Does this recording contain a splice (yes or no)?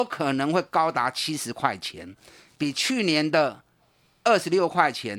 no